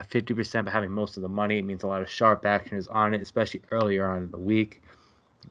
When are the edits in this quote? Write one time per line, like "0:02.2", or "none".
none